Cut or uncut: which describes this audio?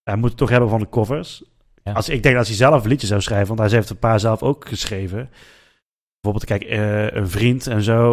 uncut